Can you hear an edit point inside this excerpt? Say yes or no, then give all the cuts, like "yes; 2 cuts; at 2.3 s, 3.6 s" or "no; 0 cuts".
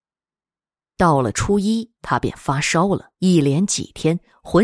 yes; 2 cuts; at 1.9 s, 3.1 s